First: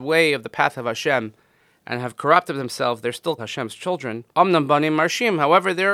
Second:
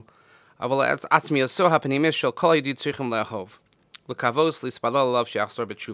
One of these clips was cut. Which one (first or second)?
first